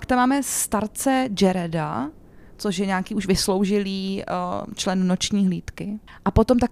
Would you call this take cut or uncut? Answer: uncut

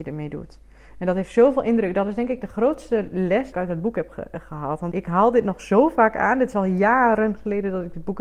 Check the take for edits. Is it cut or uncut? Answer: cut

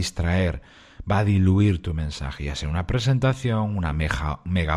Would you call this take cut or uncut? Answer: uncut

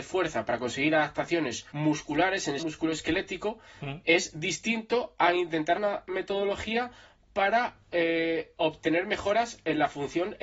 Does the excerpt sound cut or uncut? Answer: cut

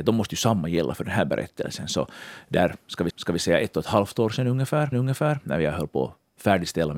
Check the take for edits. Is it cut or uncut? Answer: cut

